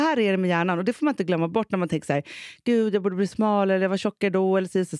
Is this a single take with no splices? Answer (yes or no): yes